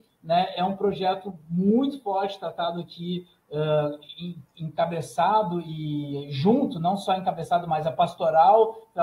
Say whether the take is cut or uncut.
uncut